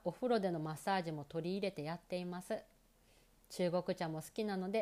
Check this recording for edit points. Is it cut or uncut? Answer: uncut